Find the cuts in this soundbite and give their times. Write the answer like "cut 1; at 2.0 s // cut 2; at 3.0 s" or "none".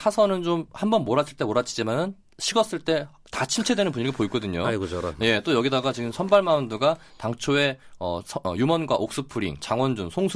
none